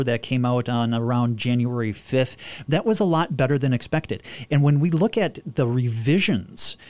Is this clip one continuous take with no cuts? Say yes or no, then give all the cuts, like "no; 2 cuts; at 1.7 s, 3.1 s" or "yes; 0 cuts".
yes; 0 cuts